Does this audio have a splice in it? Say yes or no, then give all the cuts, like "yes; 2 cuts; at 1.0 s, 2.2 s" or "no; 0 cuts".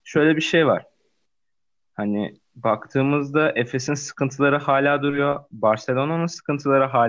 no; 0 cuts